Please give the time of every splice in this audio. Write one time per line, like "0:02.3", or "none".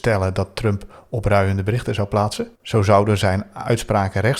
0:02.6